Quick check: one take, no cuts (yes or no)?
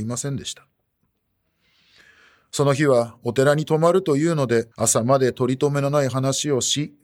no